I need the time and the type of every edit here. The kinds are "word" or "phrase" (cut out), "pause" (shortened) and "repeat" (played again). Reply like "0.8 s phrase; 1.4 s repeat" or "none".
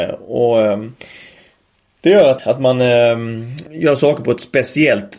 2.4 s word; 3.7 s pause